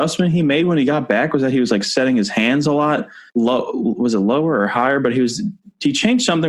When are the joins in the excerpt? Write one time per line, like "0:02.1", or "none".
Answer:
0:03.3

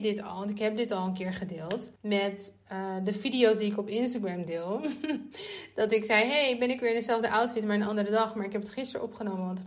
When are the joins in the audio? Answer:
0:02.0

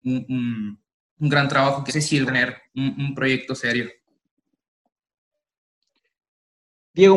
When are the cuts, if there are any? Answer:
0:01.0
0:01.9
0:02.3
0:02.7

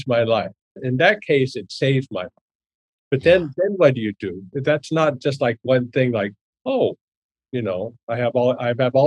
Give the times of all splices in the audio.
none

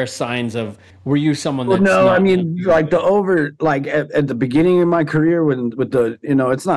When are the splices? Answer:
0:00.9

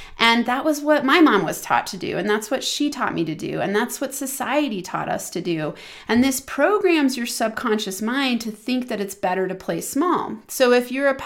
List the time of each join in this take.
none

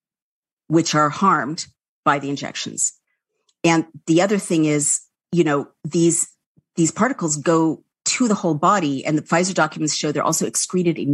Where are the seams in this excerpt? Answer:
none

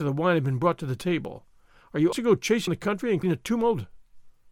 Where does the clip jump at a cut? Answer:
0:02.1
0:02.7
0:03.2

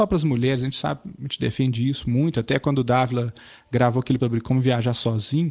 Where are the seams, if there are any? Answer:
0:04.2

